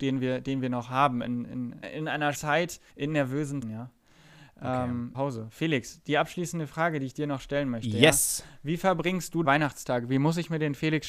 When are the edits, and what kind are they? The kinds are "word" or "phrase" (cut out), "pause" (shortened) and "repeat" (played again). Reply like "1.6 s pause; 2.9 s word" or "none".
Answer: 1.8 s word; 2.3 s word; 2.9 s pause; 3.6 s word; 5.1 s phrase; 9.4 s word